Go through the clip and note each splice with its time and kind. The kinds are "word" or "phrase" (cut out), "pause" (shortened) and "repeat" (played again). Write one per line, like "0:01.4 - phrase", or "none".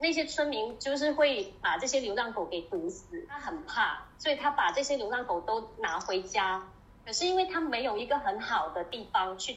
none